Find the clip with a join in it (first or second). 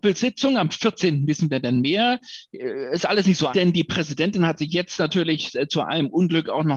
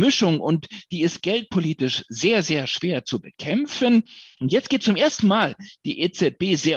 first